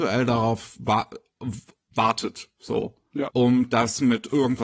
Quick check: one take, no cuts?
yes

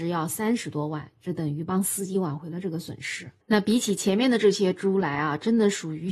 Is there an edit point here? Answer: yes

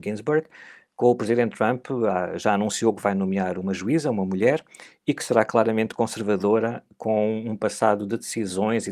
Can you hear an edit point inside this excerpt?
no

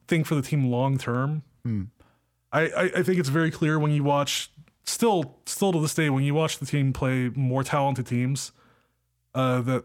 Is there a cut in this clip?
no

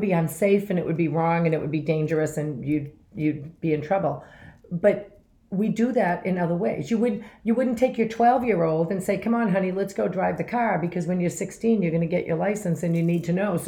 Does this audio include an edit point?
no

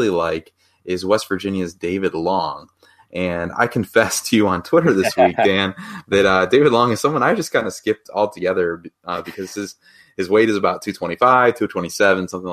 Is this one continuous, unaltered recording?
yes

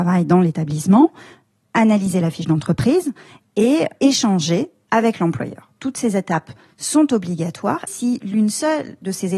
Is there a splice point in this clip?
yes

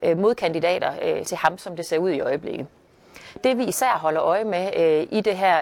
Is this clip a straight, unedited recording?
no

